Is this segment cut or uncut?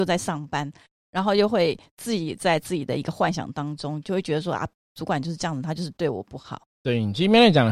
cut